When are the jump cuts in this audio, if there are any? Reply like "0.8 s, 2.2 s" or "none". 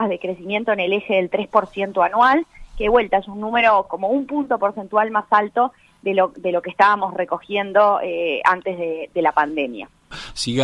none